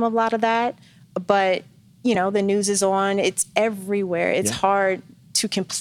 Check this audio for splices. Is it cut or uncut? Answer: uncut